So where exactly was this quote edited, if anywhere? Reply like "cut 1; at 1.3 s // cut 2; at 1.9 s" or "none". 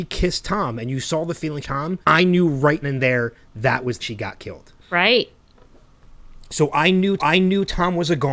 cut 1; at 1.6 s // cut 2; at 2.0 s // cut 3; at 2.8 s // cut 4; at 4.0 s // cut 5; at 4.8 s // cut 6; at 7.2 s

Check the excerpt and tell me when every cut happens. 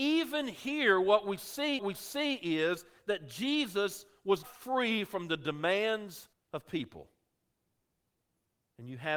cut 1; at 1.8 s // cut 2; at 4.4 s // cut 3; at 6.3 s

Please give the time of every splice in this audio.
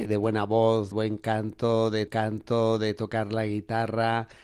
cut 1; at 0.9 s // cut 2; at 2.1 s

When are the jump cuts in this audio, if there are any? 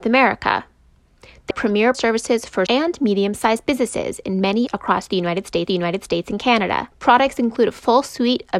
cut 1; at 1.5 s // cut 2; at 1.9 s // cut 3; at 2.7 s // cut 4; at 4.7 s // cut 5; at 5.7 s // cut 6; at 6.9 s

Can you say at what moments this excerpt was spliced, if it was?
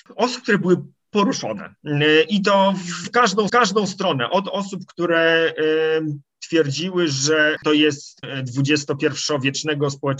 cut 1; at 3.0 s // cut 2; at 3.5 s // cut 3; at 8.2 s

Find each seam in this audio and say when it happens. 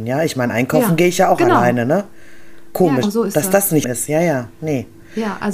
cut 1; at 3.0 s // cut 2; at 3.8 s

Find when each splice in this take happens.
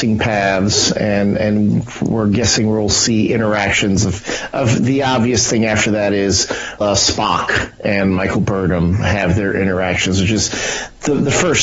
cut 1; at 6.8 s

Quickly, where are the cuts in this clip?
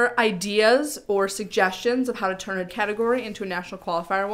cut 1; at 2.7 s

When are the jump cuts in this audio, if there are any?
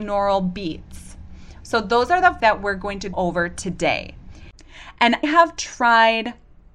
cut 1; at 2.4 s // cut 2; at 3.1 s // cut 3; at 5.2 s

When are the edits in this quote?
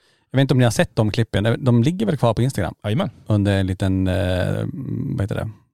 none

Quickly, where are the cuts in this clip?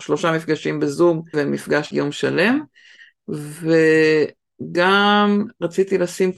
cut 1; at 1.3 s // cut 2; at 1.9 s

